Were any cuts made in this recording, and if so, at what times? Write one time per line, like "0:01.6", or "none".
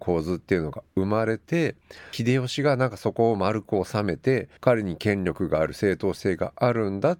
0:04.6